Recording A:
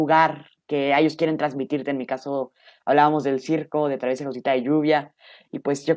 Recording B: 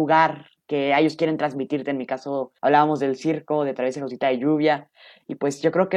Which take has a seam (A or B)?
B